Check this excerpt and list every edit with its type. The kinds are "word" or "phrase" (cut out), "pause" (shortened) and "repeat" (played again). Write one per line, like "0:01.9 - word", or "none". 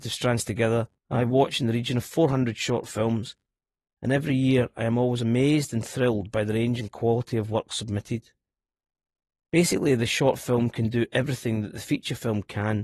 0:01.0 - pause